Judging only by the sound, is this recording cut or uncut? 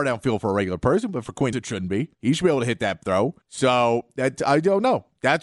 cut